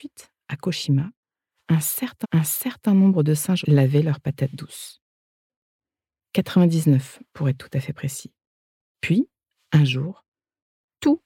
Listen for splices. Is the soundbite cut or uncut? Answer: cut